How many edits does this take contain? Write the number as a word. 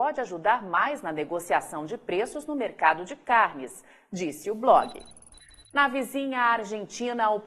zero